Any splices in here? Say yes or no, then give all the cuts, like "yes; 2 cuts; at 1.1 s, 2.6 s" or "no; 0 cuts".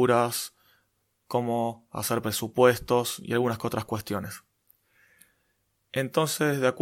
no; 0 cuts